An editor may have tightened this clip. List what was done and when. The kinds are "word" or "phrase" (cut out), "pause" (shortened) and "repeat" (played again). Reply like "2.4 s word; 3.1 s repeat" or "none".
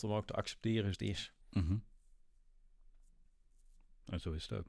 0.9 s word; 1.4 s pause